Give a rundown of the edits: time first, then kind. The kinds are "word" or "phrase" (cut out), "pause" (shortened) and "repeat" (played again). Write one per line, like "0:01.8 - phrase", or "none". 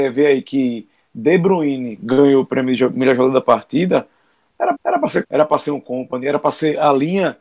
0:04.7 - repeat
0:05.2 - word